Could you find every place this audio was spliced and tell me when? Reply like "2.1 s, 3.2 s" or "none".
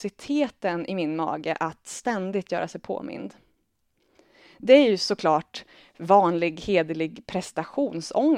none